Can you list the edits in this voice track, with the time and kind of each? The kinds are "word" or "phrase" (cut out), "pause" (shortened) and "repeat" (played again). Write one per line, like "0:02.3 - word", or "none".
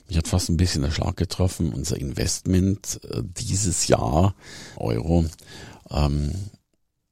0:04.8 - phrase